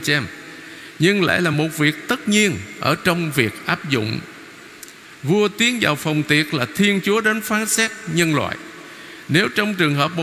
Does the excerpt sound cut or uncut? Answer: uncut